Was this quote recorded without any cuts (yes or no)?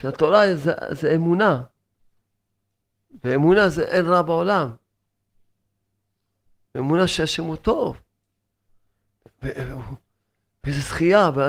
yes